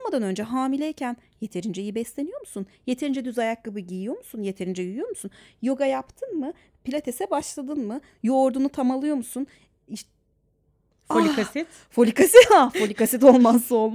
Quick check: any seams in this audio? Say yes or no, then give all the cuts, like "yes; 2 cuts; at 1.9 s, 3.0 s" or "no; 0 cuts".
no; 0 cuts